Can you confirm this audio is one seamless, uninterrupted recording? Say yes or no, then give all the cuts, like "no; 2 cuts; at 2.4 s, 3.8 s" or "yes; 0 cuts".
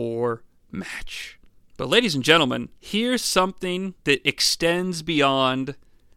no; 3 cuts; at 1.5 s, 2.8 s, 4.0 s